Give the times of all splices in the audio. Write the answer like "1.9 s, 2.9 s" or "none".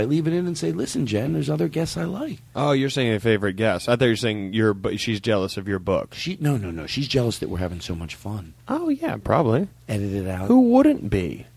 2.5 s, 8.6 s